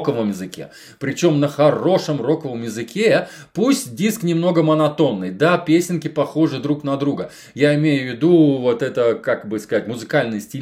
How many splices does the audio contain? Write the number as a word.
zero